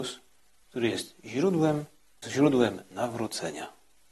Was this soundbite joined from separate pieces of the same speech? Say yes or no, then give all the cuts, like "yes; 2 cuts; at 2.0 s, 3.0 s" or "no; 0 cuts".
yes; 1 cut; at 2.2 s